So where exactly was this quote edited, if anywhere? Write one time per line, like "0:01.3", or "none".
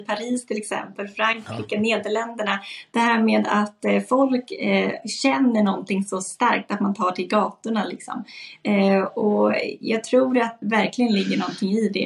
0:10.6